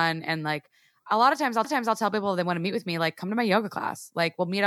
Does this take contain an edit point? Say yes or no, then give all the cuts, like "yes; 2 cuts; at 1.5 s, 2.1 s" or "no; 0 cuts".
yes; 1 cut; at 1.6 s